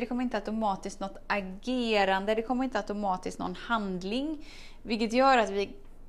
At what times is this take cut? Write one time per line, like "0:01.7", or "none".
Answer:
none